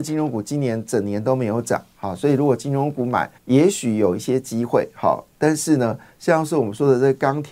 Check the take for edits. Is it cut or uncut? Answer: cut